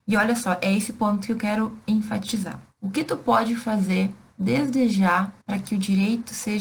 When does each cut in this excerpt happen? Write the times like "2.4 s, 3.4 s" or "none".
2.7 s, 5.4 s